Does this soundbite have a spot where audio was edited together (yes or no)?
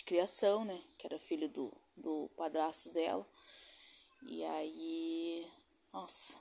no